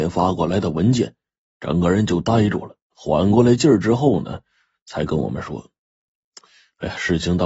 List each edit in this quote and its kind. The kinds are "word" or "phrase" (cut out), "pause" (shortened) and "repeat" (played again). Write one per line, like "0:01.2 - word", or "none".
0:02.8 - pause